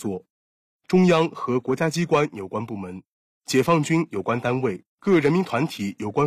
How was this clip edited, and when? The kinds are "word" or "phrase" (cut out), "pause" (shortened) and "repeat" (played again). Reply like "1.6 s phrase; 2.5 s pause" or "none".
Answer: 4.9 s pause